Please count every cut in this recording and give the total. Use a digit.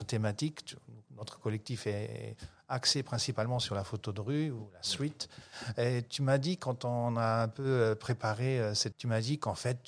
1